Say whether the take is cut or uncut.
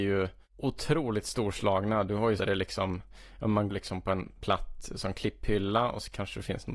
cut